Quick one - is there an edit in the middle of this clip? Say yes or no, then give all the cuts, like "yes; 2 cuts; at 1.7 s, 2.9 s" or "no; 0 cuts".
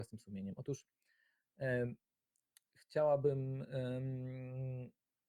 no; 0 cuts